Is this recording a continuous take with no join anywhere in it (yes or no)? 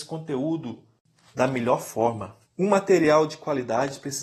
no